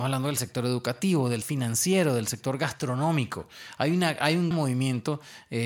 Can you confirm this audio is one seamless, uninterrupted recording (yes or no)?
no